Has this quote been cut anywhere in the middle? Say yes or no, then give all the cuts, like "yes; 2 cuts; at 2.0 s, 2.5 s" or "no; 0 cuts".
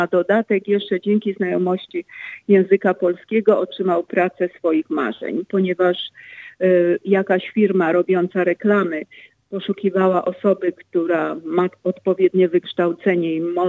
no; 0 cuts